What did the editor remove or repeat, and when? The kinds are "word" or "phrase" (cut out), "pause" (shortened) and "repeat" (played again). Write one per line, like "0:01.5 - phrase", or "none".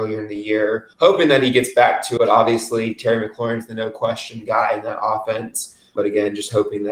0:00.9 - pause
0:02.2 - word
0:06.0 - word